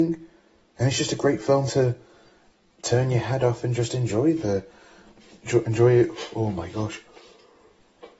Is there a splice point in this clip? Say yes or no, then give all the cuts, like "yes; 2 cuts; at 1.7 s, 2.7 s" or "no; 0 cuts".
no; 0 cuts